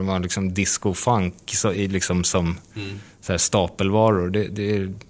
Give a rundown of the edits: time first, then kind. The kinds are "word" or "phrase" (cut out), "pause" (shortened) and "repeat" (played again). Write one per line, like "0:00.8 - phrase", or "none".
none